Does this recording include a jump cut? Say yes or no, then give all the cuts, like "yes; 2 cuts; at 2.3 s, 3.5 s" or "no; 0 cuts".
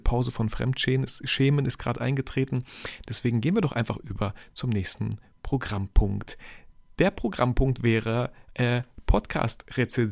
no; 0 cuts